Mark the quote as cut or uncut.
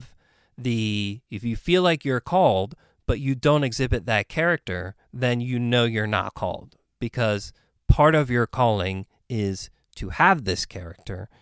uncut